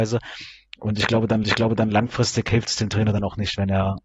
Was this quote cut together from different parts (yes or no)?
yes